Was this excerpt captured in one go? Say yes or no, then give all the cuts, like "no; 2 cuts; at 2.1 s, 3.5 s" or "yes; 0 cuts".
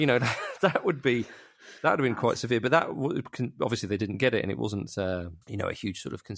no; 2 cuts; at 1.8 s, 5.4 s